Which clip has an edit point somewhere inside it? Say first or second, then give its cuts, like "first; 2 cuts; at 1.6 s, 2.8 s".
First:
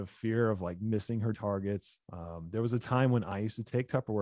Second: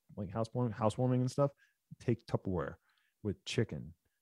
first; 2 cuts; at 1.3 s, 2.0 s